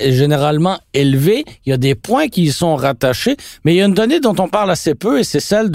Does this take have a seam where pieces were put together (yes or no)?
no